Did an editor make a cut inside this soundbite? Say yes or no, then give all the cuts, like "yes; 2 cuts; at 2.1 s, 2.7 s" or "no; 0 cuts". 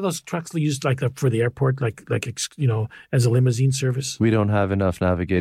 no; 0 cuts